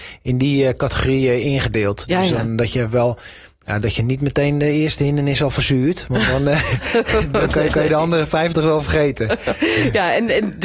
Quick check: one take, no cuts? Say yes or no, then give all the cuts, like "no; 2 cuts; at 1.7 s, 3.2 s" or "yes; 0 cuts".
no; 1 cut; at 7.7 s